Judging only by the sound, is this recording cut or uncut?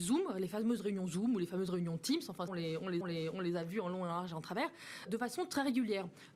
cut